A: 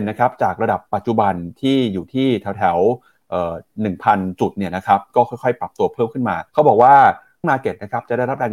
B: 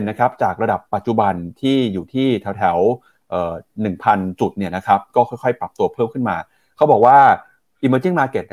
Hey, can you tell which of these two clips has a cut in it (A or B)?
A